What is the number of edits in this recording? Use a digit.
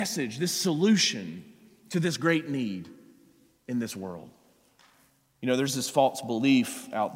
0